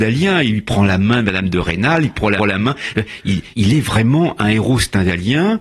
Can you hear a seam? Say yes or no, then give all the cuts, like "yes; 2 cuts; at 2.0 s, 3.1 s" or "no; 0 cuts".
yes; 2 cuts; at 2.4 s, 3.5 s